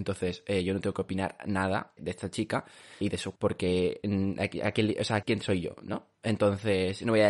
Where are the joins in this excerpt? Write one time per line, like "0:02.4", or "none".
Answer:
0:02.0
0:03.0
0:03.4
0:05.2